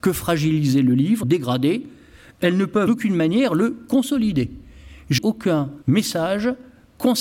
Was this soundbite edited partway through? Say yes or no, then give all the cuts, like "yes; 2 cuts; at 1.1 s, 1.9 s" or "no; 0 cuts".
yes; 4 cuts; at 1.2 s, 2.9 s, 5.2 s, 5.8 s